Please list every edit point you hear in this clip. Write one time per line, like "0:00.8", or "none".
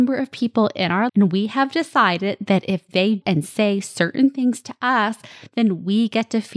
0:01.1
0:03.2